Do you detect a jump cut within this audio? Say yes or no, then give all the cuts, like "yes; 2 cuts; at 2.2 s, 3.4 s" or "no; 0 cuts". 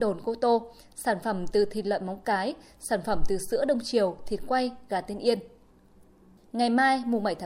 no; 0 cuts